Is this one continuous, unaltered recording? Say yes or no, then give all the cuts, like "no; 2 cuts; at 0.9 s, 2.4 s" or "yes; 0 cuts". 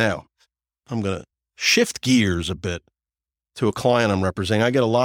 yes; 0 cuts